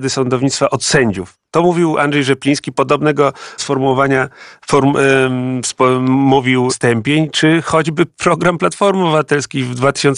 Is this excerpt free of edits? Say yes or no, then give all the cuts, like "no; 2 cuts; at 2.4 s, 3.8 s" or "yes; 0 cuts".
no; 2 cuts; at 3.6 s, 6.7 s